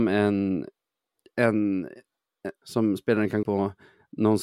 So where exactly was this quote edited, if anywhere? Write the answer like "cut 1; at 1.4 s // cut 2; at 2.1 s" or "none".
cut 1; at 2.6 s // cut 2; at 3.4 s